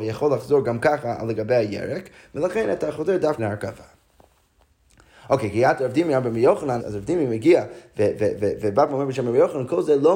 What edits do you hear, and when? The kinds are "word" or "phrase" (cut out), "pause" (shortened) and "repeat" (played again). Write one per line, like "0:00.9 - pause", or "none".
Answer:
0:03.4 - word
0:06.8 - word

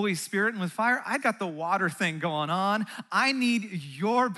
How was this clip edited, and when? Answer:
0:01.2 - word

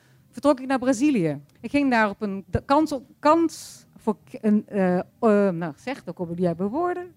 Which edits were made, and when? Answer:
0:01.5 - pause
0:03.9 - pause
0:05.1 - pause

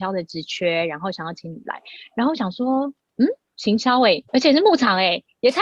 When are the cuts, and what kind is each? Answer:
0:03.4 - pause
0:04.3 - pause

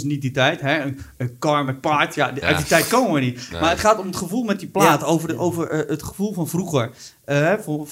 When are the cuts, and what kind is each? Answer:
none

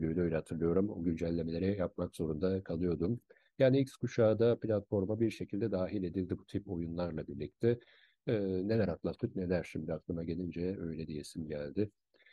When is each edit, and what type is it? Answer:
none

